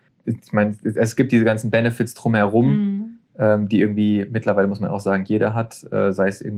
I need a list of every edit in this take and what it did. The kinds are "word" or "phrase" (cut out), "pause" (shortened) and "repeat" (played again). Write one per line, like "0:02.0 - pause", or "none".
none